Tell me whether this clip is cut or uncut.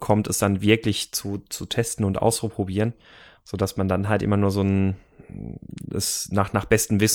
uncut